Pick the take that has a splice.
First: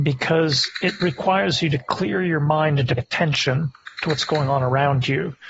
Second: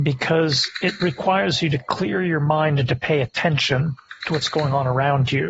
first; 1 cut; at 3.0 s

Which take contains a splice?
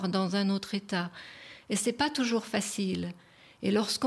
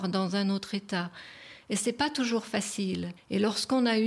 second; 1 cut; at 3.2 s

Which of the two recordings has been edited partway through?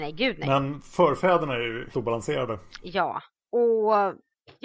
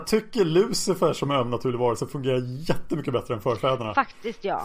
first; 1 cut; at 1.9 s

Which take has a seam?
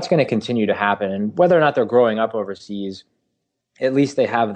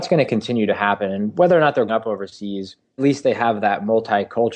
second; 2 cuts; at 1.9 s, 3.0 s

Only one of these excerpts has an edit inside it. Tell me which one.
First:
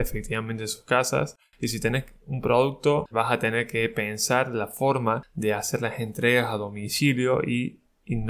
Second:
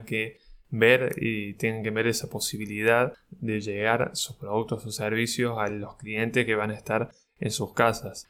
first; 1 cut; at 3.1 s

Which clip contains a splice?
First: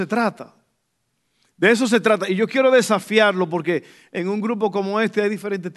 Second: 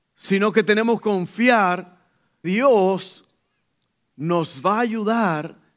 second; 2 cuts; at 1.0 s, 2.4 s

